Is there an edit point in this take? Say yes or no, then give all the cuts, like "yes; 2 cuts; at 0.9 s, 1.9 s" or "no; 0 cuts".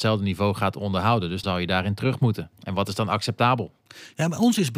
yes; 2 cuts; at 1.4 s, 2.5 s